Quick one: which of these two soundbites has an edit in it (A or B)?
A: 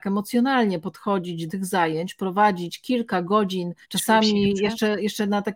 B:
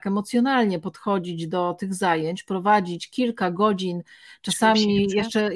A